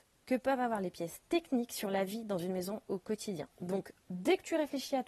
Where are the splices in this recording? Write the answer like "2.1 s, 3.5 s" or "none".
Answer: 3.5 s